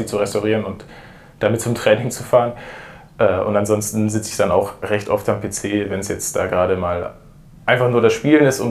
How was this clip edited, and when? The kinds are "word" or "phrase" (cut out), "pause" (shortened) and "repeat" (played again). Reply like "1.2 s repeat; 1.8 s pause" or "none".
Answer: none